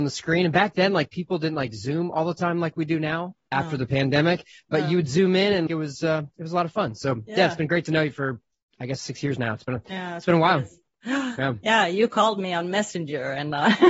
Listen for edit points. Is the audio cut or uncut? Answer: cut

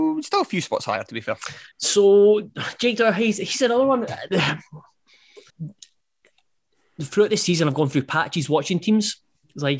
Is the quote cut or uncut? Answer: cut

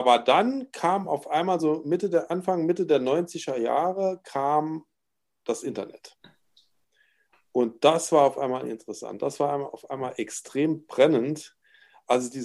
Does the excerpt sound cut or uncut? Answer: uncut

